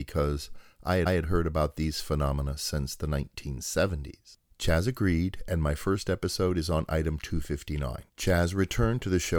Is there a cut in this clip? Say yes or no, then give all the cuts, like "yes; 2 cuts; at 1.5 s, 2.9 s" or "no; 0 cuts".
yes; 2 cuts; at 1.1 s, 8.1 s